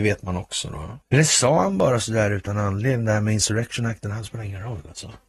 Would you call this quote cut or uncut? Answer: cut